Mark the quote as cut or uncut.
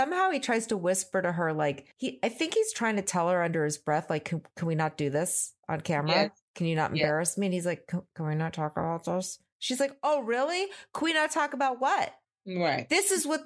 cut